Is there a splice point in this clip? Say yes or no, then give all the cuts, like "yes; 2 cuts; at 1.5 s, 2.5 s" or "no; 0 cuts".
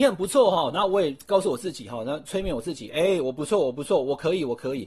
no; 0 cuts